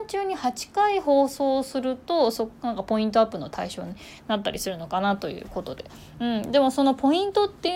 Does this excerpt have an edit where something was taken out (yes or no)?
no